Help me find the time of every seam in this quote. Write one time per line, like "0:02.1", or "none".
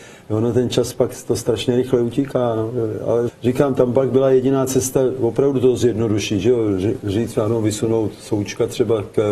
0:03.3